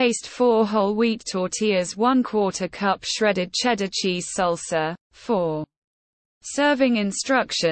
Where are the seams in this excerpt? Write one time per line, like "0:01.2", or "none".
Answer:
none